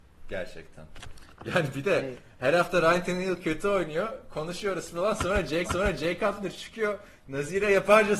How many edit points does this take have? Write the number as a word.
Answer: one